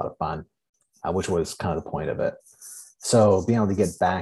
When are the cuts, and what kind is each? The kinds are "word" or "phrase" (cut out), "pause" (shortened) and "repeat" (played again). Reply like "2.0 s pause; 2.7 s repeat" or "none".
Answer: none